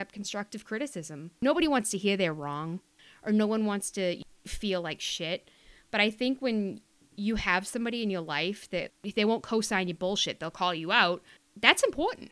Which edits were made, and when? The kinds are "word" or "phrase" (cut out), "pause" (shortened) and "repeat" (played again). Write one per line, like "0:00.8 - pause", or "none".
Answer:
0:01.4 - pause